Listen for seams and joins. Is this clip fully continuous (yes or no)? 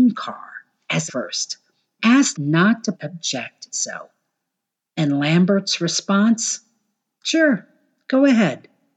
no